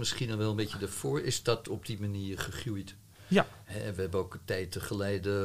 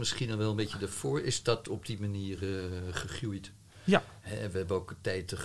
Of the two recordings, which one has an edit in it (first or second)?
first